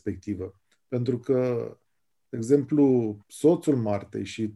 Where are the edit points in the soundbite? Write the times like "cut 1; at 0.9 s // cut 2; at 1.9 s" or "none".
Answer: cut 1; at 3.2 s